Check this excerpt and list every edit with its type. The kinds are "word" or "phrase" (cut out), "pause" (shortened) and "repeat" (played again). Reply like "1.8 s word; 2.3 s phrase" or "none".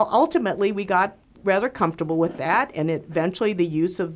1.2 s pause